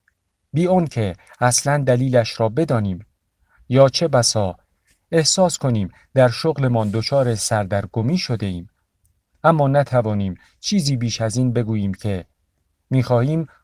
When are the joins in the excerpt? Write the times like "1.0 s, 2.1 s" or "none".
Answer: none